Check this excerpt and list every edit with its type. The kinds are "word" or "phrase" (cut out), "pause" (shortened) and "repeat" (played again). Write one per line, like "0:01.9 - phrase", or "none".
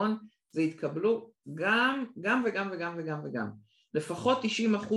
none